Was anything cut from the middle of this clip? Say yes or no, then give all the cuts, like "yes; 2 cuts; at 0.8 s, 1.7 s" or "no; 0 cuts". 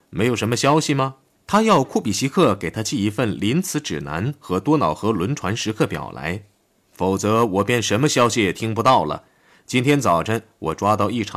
no; 0 cuts